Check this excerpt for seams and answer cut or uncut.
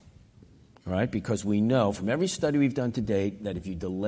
uncut